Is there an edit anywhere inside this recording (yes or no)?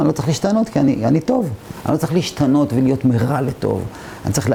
no